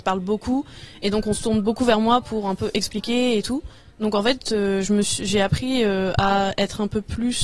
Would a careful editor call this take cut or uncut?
uncut